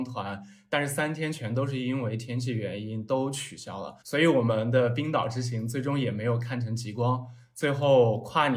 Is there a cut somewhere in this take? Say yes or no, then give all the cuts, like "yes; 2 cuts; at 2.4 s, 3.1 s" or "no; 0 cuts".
yes; 1 cut; at 4.0 s